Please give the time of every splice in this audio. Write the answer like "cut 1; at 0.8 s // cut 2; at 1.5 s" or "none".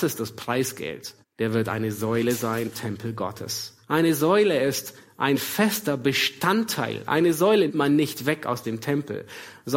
cut 1; at 1.2 s // cut 2; at 2.7 s // cut 3; at 3.8 s // cut 4; at 7.7 s

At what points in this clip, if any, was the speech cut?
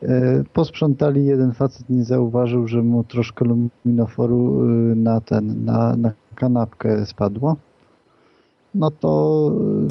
none

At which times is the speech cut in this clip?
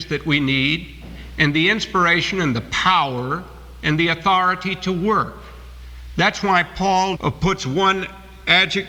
cut 1; at 7.2 s

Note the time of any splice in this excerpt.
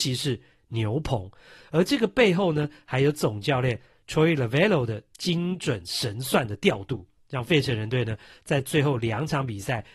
none

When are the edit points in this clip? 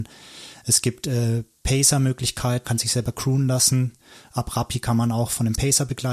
cut 1; at 2.6 s

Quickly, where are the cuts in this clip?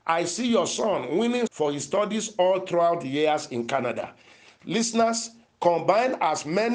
cut 1; at 1.5 s

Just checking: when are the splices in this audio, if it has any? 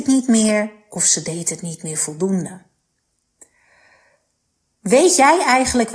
none

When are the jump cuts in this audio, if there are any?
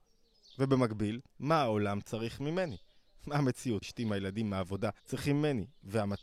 cut 1; at 1.3 s // cut 2; at 3.8 s // cut 3; at 5.0 s

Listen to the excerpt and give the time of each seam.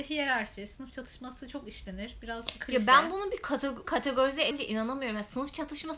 cut 1; at 3.8 s // cut 2; at 4.5 s

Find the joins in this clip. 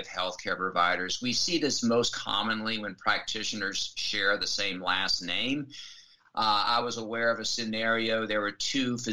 none

